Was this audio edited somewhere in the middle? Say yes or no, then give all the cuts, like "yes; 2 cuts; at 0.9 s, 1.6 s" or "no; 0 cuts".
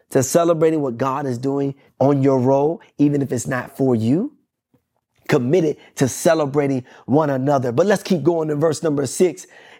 yes; 1 cut; at 1.9 s